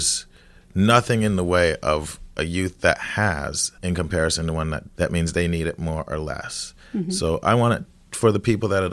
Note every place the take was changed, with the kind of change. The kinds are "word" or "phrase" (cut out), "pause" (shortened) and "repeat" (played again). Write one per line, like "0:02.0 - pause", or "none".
0:03.8 - pause
0:04.9 - word